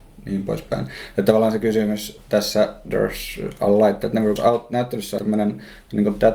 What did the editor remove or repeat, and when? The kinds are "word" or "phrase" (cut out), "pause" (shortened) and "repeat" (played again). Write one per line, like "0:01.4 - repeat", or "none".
0:04.4 - word
0:05.2 - word